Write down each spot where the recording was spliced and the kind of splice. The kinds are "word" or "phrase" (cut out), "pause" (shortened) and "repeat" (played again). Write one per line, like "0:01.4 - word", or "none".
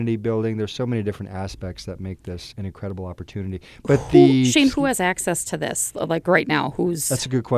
0:02.5 - word